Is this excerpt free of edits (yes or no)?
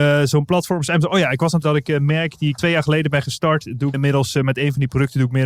no